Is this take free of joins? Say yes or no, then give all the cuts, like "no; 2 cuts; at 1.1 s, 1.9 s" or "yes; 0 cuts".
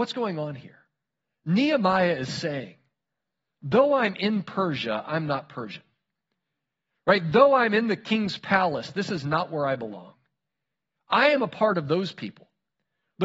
yes; 0 cuts